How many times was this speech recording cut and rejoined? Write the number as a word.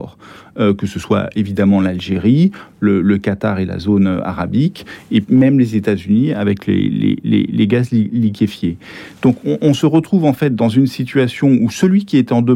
zero